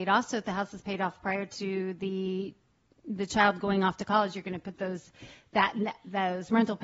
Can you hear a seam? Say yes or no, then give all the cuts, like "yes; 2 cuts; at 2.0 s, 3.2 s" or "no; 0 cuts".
no; 0 cuts